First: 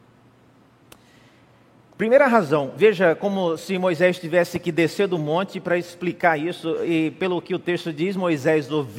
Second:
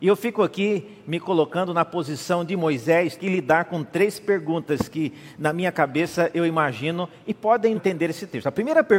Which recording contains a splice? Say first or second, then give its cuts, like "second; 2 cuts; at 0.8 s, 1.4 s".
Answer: second; 2 cuts; at 3.2 s, 7.7 s